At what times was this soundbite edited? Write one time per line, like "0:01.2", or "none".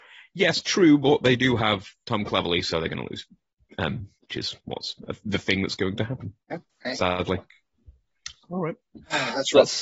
0:04.2
0:06.4